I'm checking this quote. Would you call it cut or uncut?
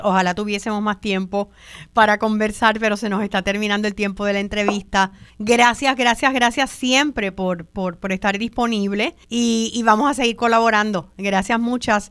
cut